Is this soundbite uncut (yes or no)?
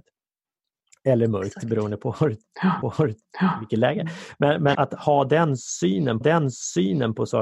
no